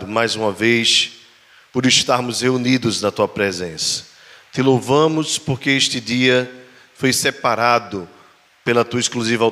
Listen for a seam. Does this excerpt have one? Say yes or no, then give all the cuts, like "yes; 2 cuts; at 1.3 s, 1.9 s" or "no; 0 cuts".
no; 0 cuts